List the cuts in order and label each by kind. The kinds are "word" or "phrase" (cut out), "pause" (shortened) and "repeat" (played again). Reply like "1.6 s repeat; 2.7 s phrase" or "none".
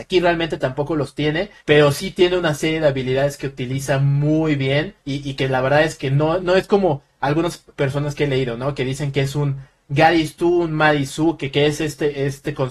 1.6 s pause; 5.0 s pause; 6.4 s word